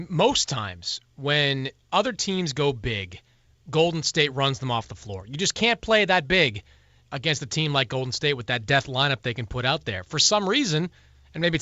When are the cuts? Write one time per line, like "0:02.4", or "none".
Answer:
none